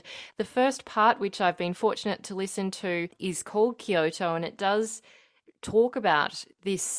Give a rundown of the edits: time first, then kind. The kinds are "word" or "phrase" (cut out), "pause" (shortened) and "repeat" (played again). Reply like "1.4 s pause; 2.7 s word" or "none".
none